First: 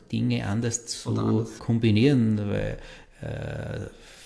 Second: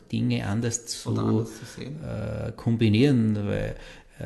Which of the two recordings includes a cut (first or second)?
first